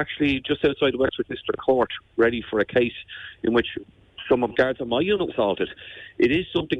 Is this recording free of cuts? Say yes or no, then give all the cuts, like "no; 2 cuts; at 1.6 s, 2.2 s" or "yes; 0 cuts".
no; 2 cuts; at 4.5 s, 5.3 s